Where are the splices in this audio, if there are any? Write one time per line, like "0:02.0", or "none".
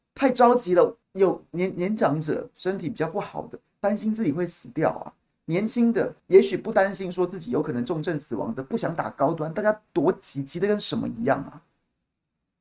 0:01.0
0:06.2